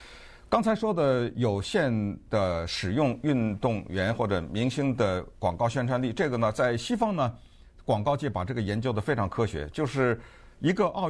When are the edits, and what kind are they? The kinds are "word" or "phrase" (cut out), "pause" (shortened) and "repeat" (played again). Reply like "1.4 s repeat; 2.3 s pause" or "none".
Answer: none